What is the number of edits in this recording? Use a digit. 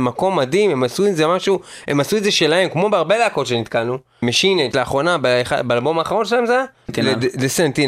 1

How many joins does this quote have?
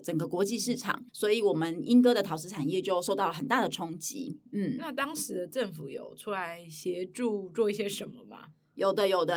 1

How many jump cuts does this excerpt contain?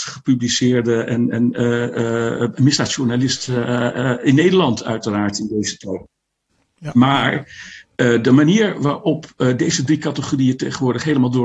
0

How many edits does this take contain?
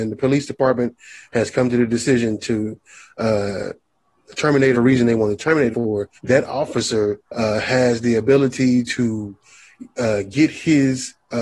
4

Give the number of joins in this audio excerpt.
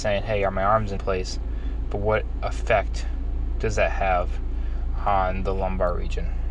1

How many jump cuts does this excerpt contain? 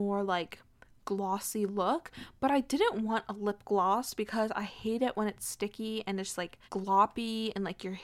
1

